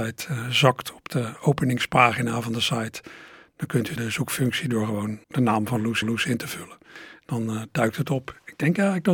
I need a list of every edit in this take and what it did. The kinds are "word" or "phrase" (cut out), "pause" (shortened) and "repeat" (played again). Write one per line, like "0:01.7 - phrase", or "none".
0:04.0 - phrase
0:05.2 - pause
0:06.0 - repeat